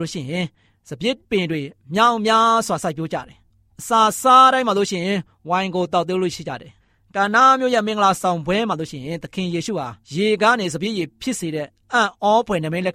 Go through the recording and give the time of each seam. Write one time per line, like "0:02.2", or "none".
0:01.2
0:06.8
0:10.0